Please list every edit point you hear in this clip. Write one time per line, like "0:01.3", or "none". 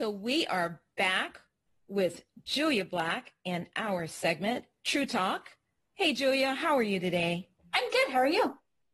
none